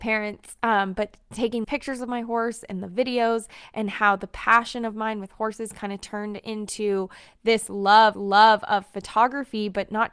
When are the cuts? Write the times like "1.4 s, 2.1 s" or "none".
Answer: 1.6 s, 8.1 s